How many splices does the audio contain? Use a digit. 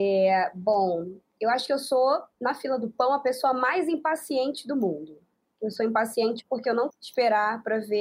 2